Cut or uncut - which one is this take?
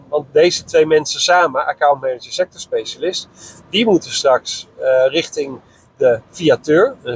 uncut